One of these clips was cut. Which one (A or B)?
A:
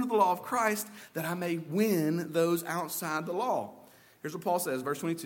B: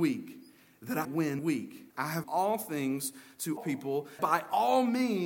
B